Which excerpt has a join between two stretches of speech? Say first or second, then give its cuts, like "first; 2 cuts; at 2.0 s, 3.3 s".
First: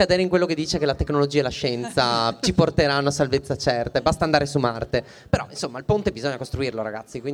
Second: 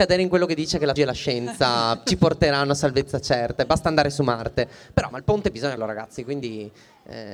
second; 3 cuts; at 1.0 s, 5.1 s, 5.8 s